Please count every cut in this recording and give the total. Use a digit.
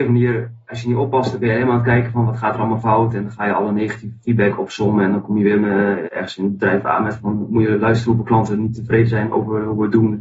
1